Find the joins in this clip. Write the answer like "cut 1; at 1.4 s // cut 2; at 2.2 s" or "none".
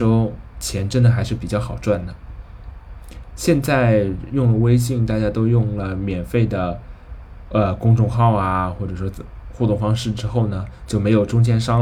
none